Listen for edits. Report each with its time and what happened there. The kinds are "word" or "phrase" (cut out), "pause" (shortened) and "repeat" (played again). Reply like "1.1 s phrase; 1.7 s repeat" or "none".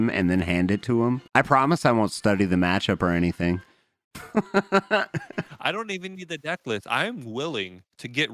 1.3 s pause